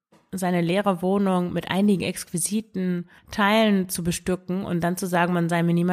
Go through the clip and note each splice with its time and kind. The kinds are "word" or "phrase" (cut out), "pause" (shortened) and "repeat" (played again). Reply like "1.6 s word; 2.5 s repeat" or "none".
3.2 s pause